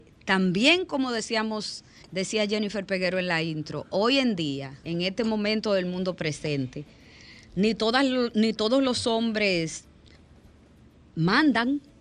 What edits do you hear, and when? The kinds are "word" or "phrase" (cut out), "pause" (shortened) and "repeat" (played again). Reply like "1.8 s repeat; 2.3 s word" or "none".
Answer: 2.0 s pause; 4.8 s phrase